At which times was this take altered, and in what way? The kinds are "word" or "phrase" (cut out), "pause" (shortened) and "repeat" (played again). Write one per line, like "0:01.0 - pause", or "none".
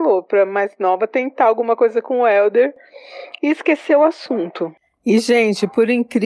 none